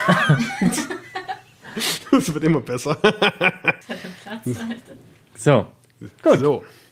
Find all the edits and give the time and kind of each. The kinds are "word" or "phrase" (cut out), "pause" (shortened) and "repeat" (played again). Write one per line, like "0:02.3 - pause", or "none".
none